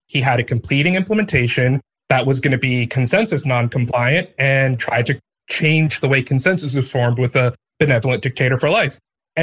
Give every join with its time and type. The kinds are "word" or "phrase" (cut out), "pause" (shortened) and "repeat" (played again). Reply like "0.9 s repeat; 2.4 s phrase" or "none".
none